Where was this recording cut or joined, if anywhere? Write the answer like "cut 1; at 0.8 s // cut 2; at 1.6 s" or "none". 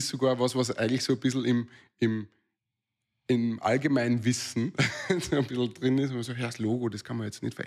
none